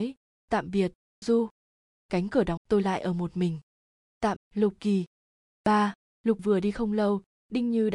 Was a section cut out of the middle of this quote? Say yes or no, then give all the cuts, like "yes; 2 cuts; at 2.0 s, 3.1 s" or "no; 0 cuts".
yes; 4 cuts; at 1.2 s, 2.6 s, 4.4 s, 6.4 s